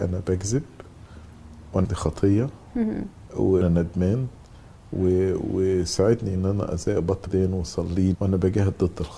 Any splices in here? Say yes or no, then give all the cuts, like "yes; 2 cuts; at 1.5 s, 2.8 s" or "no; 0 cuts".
yes; 5 cuts; at 1.8 s, 3.6 s, 6.3 s, 7.3 s, 8.1 s